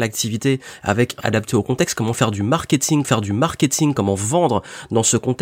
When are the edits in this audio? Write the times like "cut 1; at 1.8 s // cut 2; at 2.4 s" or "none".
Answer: cut 1; at 1.2 s // cut 2; at 3.0 s